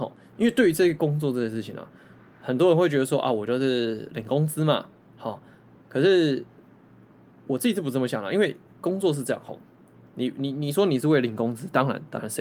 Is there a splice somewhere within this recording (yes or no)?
no